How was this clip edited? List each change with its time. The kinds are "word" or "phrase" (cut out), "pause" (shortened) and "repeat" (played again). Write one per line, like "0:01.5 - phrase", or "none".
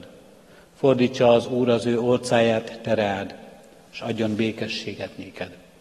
none